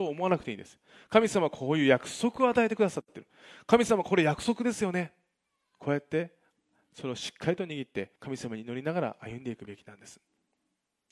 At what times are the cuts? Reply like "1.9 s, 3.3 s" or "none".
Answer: 8.2 s